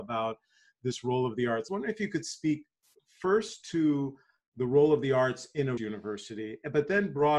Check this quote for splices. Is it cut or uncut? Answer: cut